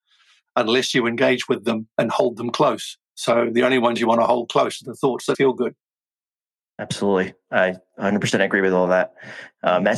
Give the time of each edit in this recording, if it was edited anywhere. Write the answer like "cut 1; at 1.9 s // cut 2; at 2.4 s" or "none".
cut 1; at 3.1 s // cut 2; at 5.3 s